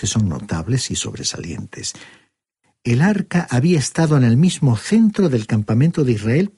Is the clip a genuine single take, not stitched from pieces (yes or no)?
yes